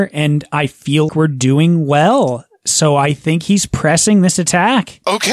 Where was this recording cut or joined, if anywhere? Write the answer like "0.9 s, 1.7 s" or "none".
1.1 s

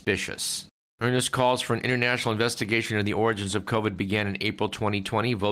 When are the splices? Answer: none

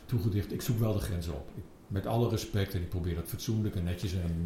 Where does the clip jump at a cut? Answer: none

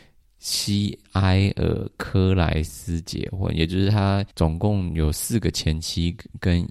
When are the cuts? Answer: 4.3 s

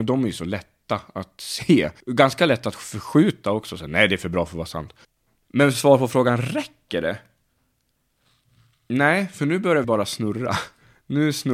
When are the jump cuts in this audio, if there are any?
2.0 s, 5.0 s, 9.8 s

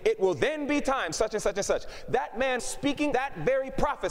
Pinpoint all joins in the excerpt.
1.1 s, 2.6 s, 3.1 s

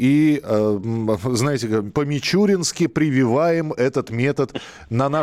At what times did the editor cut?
none

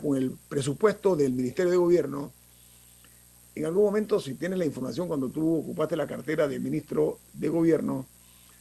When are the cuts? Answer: none

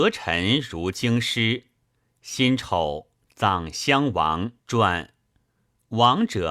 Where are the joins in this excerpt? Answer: 4.6 s

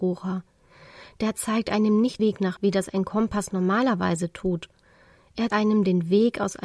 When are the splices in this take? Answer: 2.2 s, 2.6 s, 5.5 s

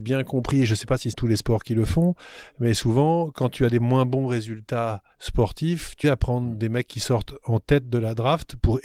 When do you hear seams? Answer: 1.1 s, 5.1 s, 6.0 s

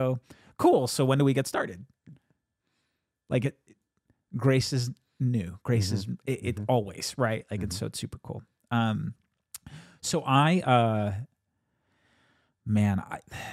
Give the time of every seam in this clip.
none

